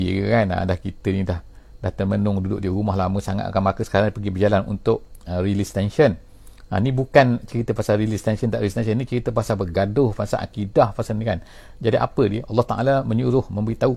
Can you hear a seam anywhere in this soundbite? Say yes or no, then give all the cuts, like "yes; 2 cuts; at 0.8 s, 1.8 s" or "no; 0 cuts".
no; 0 cuts